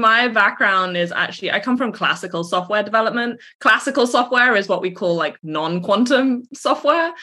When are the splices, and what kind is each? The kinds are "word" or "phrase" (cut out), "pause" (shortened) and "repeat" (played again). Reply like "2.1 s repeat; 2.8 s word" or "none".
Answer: none